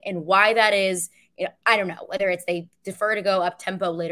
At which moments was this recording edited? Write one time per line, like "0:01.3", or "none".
none